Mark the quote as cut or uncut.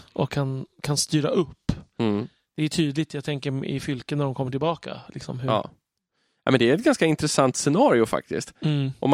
uncut